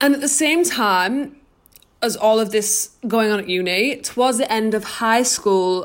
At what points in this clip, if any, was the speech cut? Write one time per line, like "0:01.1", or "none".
none